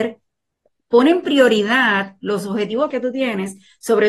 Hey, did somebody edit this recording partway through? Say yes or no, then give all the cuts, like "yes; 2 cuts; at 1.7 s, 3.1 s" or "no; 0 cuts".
yes; 1 cut; at 2.9 s